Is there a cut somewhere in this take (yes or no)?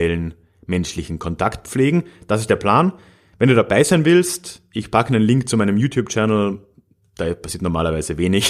no